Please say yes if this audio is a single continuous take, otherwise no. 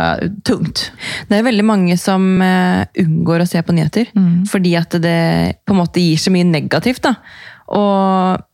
yes